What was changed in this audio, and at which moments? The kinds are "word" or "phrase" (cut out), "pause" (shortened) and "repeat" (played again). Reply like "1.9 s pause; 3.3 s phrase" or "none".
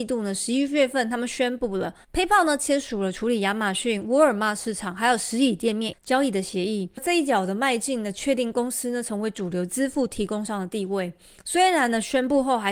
none